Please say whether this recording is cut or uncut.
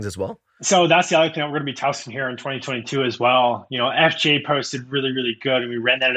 uncut